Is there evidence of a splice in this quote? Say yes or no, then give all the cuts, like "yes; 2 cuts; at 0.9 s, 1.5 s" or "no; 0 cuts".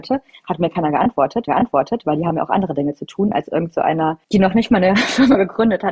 yes; 2 cuts; at 1.5 s, 4.2 s